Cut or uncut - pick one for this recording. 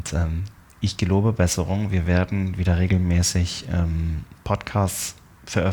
uncut